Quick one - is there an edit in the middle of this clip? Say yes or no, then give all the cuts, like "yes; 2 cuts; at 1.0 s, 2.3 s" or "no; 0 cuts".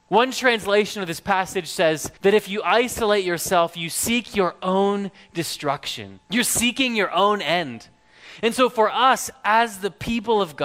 yes; 2 cuts; at 2.2 s, 6.2 s